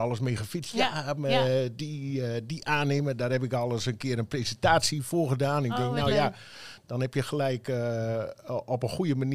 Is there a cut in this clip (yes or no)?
no